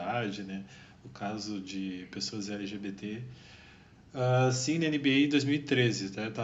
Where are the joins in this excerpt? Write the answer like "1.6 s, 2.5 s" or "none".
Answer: none